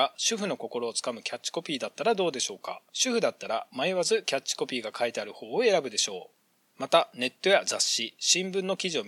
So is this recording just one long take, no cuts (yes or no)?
no